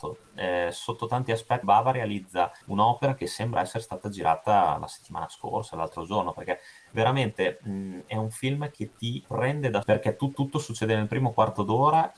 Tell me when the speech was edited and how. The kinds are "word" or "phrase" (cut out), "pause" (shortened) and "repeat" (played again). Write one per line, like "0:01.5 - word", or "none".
0:01.6 - word
0:02.6 - pause
0:09.2 - word
0:09.8 - word
0:10.3 - repeat